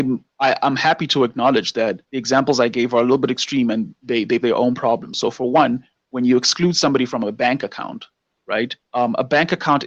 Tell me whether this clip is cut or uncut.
cut